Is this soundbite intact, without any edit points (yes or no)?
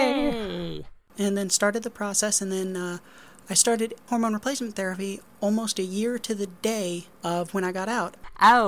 yes